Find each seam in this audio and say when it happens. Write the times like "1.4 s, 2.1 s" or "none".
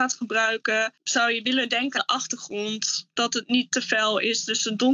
2.0 s